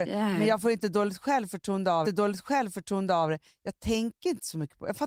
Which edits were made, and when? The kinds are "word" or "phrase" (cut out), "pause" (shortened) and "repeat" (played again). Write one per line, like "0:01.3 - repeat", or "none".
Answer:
0:02.0 - repeat